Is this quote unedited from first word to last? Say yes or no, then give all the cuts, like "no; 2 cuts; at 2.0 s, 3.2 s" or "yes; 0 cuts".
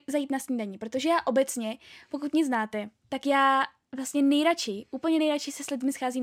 yes; 0 cuts